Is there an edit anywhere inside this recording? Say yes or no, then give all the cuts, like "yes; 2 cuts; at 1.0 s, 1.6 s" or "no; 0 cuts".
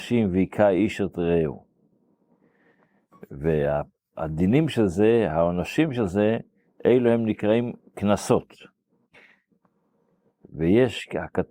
no; 0 cuts